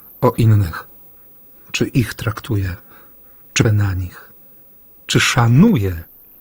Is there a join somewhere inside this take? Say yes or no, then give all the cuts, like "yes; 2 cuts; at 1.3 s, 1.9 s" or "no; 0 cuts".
yes; 1 cut; at 3.6 s